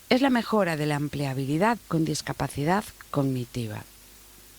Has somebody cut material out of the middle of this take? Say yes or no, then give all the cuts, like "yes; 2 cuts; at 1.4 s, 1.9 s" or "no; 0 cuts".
yes; 1 cut; at 1.8 s